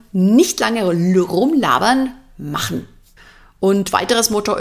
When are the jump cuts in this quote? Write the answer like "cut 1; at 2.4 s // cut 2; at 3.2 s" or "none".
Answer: cut 1; at 3.2 s